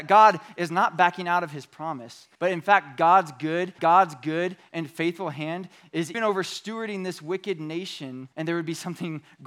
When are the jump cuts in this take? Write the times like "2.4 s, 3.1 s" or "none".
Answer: 2.3 s, 3.8 s, 6.1 s, 8.3 s